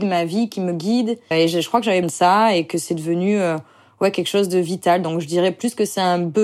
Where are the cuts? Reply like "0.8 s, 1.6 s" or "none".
1.3 s, 2.0 s

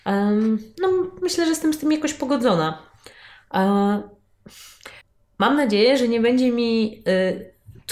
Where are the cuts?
5.0 s

